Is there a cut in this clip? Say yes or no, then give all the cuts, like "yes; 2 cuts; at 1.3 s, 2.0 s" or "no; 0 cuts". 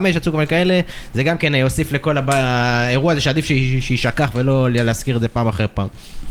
no; 0 cuts